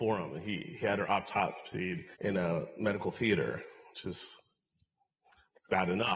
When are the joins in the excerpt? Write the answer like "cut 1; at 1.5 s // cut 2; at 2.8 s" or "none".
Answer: cut 1; at 2.1 s